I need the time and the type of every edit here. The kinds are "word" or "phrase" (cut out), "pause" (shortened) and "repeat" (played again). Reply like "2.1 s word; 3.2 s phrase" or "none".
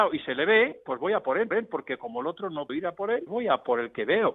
1.5 s repeat; 2.7 s word; 3.3 s word

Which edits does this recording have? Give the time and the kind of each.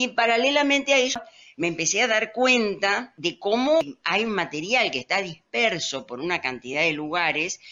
none

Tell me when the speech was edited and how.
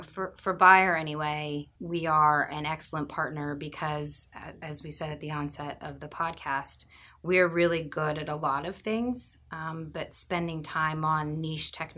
1.8 s pause

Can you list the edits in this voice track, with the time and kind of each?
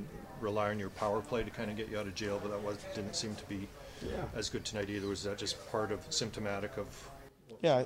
none

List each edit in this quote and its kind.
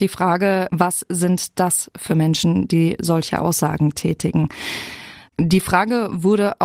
none

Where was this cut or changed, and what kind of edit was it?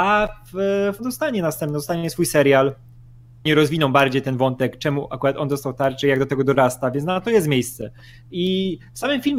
1.0 s word

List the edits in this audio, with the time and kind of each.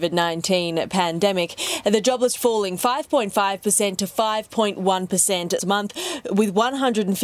2.4 s word; 2.8 s word; 5.6 s word

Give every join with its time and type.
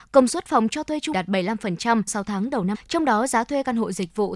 1.1 s word; 2.1 s word; 2.7 s word

